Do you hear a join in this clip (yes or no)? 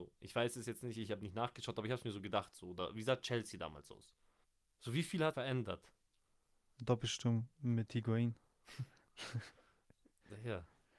yes